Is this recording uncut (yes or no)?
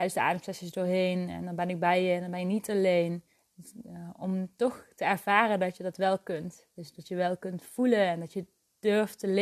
yes